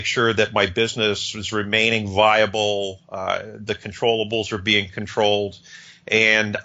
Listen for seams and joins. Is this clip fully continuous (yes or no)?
yes